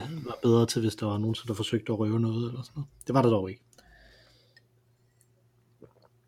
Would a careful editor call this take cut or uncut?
uncut